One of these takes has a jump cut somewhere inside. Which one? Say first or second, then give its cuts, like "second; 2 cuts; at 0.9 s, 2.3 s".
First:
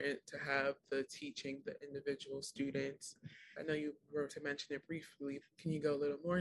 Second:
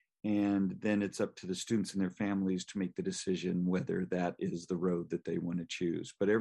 first; 4 cuts; at 1.6 s, 3.5 s, 4.3 s, 5.4 s